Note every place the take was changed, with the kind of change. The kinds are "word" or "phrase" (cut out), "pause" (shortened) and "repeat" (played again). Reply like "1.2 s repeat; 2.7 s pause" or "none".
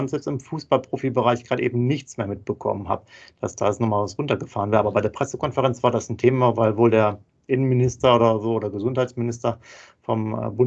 none